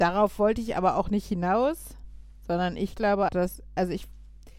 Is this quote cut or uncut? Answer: cut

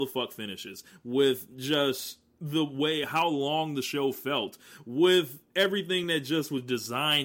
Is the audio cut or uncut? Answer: uncut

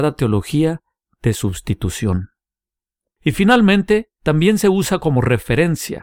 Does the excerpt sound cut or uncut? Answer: uncut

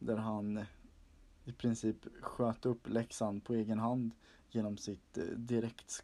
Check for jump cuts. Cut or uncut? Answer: uncut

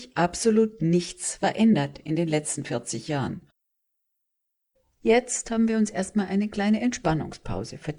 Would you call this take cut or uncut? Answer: uncut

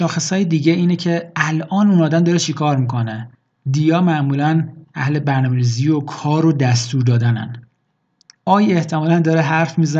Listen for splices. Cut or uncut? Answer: uncut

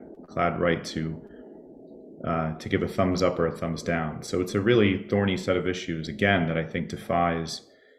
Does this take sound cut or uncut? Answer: uncut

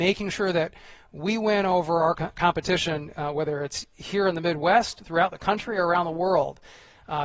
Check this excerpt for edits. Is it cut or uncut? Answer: uncut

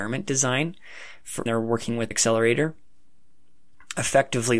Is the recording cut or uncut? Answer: cut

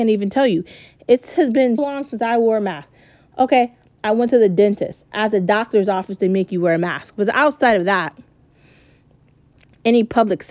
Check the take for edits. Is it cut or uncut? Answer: cut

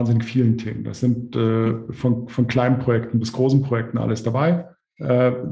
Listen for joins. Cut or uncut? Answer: uncut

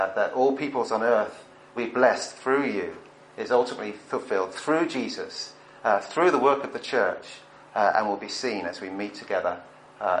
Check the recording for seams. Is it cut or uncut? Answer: cut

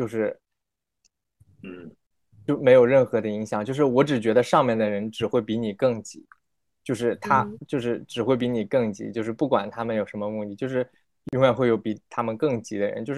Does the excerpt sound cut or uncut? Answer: uncut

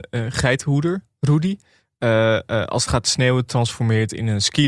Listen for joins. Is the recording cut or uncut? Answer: uncut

